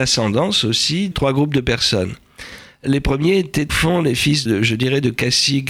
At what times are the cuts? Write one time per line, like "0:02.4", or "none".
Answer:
0:01.1
0:03.7
0:04.5